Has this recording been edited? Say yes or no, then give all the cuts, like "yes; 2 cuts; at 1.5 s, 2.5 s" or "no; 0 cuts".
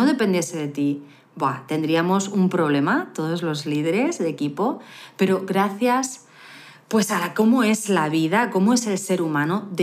no; 0 cuts